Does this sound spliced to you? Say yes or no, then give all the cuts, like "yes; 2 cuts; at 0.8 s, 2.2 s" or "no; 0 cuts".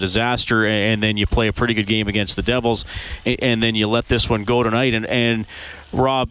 no; 0 cuts